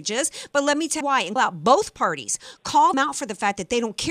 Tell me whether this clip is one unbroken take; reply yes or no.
no